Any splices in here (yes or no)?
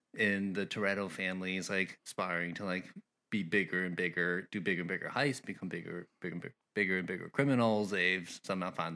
no